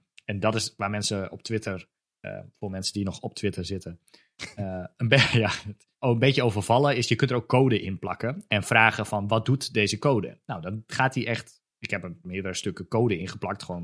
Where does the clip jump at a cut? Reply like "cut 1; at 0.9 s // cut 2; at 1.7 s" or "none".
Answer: cut 1; at 5.9 s